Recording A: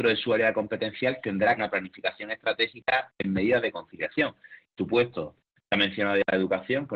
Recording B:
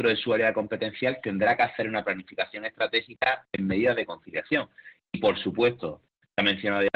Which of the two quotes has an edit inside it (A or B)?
A